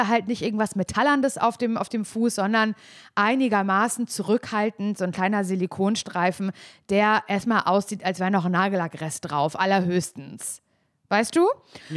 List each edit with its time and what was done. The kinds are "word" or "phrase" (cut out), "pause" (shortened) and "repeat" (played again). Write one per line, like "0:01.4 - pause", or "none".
none